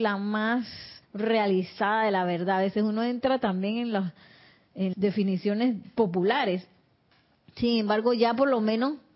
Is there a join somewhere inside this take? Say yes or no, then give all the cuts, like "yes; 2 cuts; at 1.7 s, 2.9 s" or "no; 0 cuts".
yes; 2 cuts; at 1.0 s, 4.9 s